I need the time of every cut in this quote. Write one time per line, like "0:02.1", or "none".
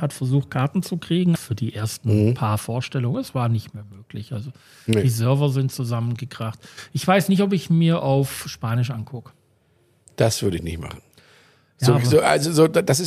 0:01.3